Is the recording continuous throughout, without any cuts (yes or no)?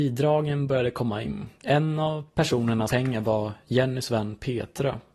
no